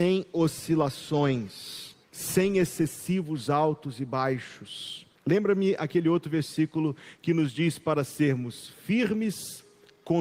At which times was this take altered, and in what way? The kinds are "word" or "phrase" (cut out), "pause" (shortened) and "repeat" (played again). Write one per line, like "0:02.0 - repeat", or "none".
0:02.0 - pause
0:05.2 - pause